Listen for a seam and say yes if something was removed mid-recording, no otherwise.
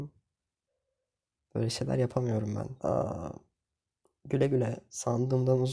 yes